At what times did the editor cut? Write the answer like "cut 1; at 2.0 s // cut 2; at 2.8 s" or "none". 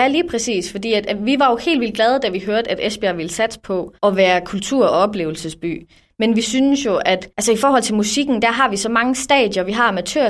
cut 1; at 4.0 s // cut 2; at 7.3 s